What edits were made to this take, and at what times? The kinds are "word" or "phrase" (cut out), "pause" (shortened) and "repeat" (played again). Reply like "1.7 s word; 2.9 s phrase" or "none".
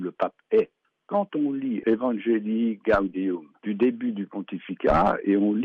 3.6 s pause